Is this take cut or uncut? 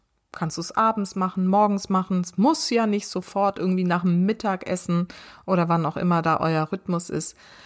uncut